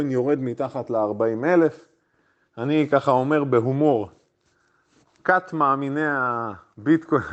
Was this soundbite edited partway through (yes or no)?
no